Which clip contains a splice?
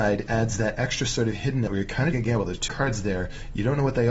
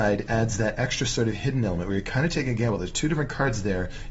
first; 3 cuts; at 1.7 s, 2.1 s, 2.7 s

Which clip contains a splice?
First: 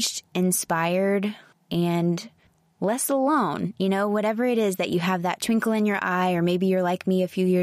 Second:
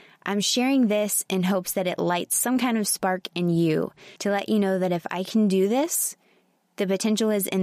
second; 1 cut; at 4.2 s

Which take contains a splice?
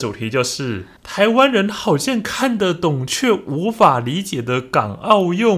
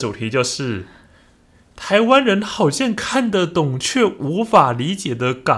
first; 1 cut; at 1.0 s

